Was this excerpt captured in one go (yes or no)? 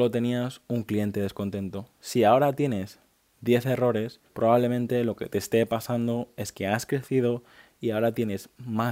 no